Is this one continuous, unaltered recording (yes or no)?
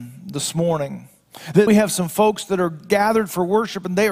no